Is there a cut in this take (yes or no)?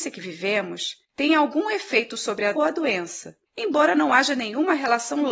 yes